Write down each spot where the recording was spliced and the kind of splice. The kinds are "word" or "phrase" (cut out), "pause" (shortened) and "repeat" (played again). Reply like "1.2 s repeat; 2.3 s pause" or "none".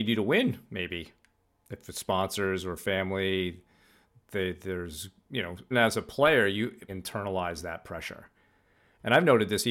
5.7 s word; 6.9 s word